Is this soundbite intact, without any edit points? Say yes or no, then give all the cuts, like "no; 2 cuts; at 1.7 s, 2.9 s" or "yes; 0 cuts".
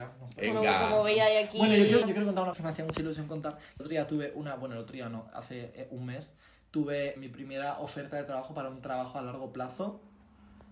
no; 4 cuts; at 2.0 s, 2.5 s, 3.8 s, 7.2 s